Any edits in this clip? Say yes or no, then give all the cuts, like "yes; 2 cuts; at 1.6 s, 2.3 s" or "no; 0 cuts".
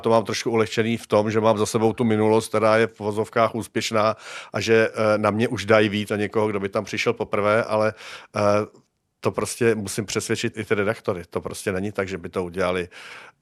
yes; 2 cuts; at 6.1 s, 10.5 s